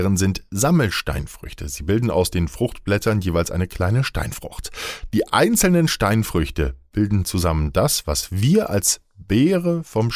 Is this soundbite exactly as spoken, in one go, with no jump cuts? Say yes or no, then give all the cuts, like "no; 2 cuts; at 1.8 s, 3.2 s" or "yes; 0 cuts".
yes; 0 cuts